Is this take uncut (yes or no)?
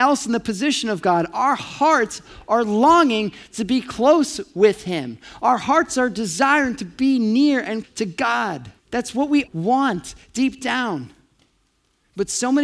no